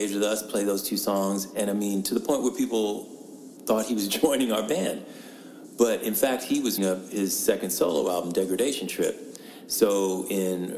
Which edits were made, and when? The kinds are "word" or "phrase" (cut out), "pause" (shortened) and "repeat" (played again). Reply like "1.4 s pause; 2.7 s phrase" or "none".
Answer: 6.8 s word